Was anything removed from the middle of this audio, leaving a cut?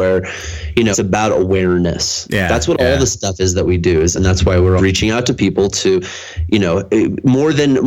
yes; 3 cuts; at 0.9 s, 4.1 s, 4.8 s

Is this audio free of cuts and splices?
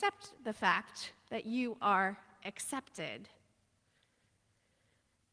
yes; 0 cuts

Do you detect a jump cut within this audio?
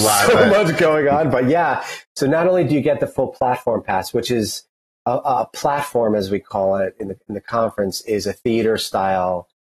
no; 0 cuts

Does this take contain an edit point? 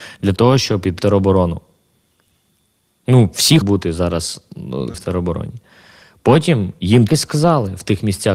yes; 4 cuts; at 1.0 s, 3.6 s, 4.9 s, 7.1 s

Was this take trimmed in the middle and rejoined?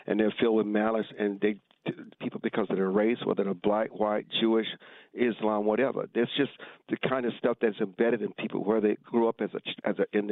yes; 1 cut; at 2.2 s

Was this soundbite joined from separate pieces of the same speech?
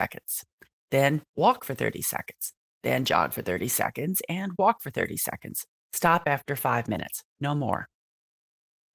no; 0 cuts

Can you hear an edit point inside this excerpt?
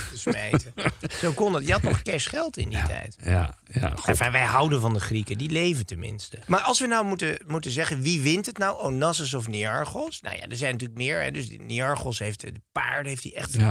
no; 0 cuts

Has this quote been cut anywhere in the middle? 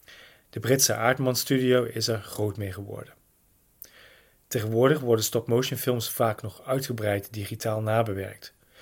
no; 0 cuts

